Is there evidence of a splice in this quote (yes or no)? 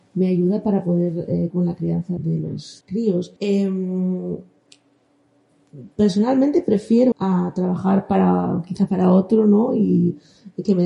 yes